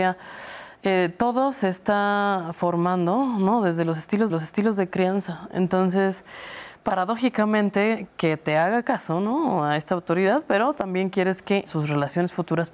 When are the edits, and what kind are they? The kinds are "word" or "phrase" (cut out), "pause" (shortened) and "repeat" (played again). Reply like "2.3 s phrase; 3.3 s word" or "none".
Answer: 4.3 s repeat; 8.1 s word; 11.7 s word